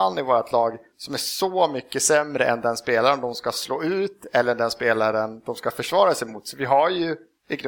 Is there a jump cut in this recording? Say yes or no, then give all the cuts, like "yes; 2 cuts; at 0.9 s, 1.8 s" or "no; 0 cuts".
no; 0 cuts